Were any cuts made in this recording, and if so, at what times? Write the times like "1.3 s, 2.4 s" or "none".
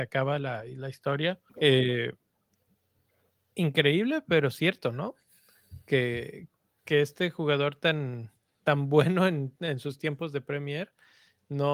1.5 s